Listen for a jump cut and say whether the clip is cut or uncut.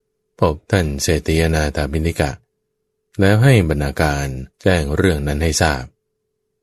cut